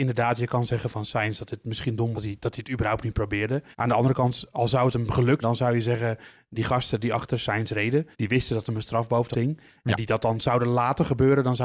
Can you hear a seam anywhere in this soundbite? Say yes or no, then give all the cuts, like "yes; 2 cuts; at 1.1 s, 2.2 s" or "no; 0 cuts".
yes; 5 cuts; at 2.1 s, 3.7 s, 5.4 s, 8.1 s, 9.3 s